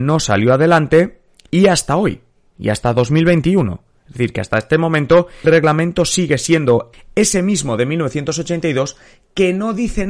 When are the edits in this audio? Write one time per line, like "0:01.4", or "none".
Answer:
0:05.4
0:06.9